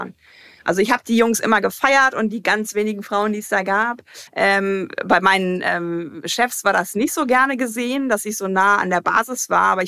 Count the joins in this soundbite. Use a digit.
1